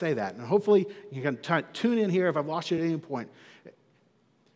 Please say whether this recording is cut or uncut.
uncut